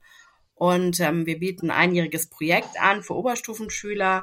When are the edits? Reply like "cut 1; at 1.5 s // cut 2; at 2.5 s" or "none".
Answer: cut 1; at 1.6 s

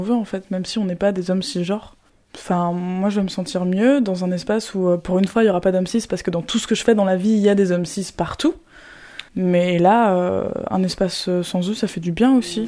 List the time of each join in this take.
cut 1; at 2.1 s // cut 2; at 9.3 s

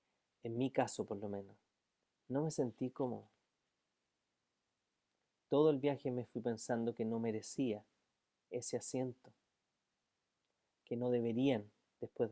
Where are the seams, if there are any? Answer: cut 1; at 2.1 s

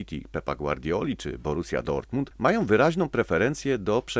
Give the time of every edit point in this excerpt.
none

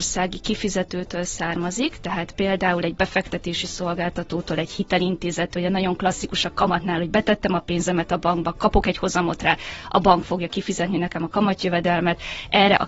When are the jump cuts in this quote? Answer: none

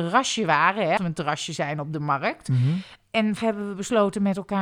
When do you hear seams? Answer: cut 1; at 1.0 s // cut 2; at 3.4 s

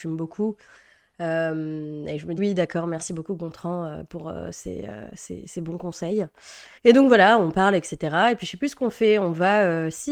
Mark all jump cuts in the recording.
cut 1; at 2.4 s // cut 2; at 6.8 s

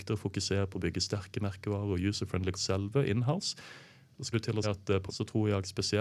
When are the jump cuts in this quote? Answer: cut 1; at 2.5 s // cut 2; at 4.3 s // cut 3; at 4.6 s // cut 4; at 5.1 s

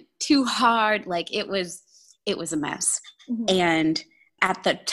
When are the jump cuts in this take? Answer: none

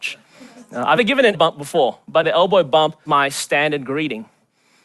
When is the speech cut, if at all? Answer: cut 1; at 1.0 s // cut 2; at 1.3 s // cut 3; at 2.2 s // cut 4; at 3.0 s

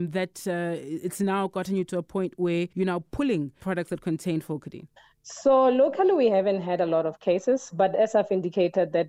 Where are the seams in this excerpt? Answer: cut 1; at 2.7 s // cut 2; at 3.6 s // cut 3; at 5.0 s

